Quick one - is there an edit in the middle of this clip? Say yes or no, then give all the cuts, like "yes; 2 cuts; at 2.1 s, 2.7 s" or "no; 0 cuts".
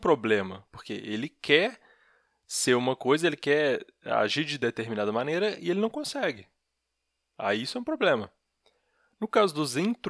no; 0 cuts